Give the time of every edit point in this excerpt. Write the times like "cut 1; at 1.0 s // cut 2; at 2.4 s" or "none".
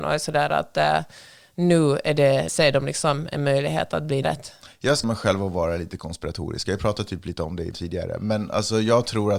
cut 1; at 2.5 s // cut 2; at 4.2 s // cut 3; at 5.0 s // cut 4; at 7.7 s